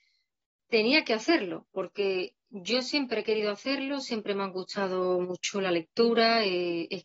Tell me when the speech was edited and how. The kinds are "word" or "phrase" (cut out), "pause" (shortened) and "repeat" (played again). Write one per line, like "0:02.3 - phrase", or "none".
none